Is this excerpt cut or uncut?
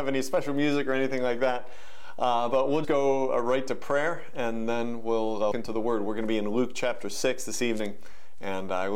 cut